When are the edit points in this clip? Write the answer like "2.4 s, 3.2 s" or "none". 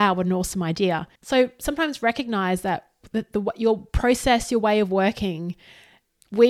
1.2 s